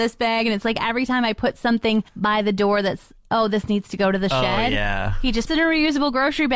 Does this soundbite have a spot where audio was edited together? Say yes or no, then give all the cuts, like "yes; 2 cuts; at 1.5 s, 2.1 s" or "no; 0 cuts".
yes; 2 cuts; at 2.1 s, 5.5 s